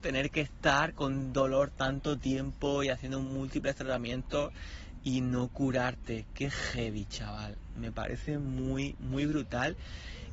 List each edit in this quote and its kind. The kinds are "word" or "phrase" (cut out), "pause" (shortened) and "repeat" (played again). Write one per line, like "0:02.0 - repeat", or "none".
none